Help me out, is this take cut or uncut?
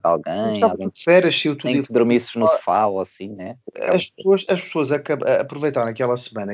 uncut